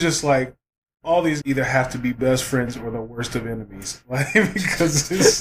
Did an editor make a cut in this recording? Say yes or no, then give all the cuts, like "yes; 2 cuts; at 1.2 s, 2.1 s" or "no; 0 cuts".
yes; 1 cut; at 1.4 s